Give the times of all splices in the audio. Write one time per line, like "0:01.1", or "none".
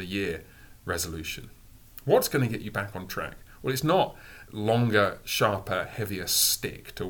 0:04.5